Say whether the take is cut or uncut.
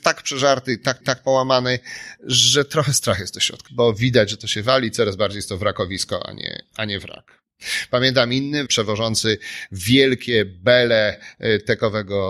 cut